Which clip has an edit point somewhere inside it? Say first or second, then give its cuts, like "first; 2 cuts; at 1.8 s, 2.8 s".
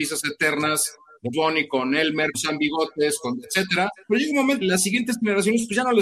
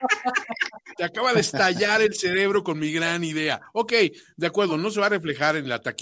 first; 4 cuts; at 1.3 s, 2.3 s, 4.0 s, 4.6 s